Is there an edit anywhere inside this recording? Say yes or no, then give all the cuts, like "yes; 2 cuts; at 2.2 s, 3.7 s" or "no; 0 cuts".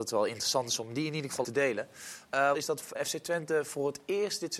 yes; 3 cuts; at 1.4 s, 2.5 s, 3.0 s